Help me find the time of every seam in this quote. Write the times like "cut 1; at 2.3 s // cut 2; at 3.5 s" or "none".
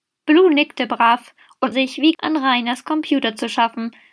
cut 1; at 1.7 s // cut 2; at 2.1 s

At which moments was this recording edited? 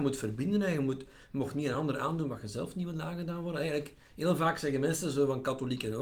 none

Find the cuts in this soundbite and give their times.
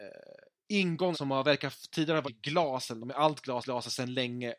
cut 1; at 1.1 s // cut 2; at 2.2 s // cut 3; at 3.0 s // cut 4; at 3.6 s

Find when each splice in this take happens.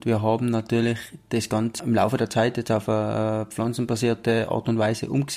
cut 1; at 1.8 s

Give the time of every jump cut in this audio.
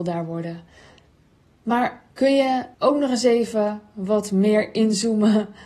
cut 1; at 2.1 s // cut 2; at 2.7 s

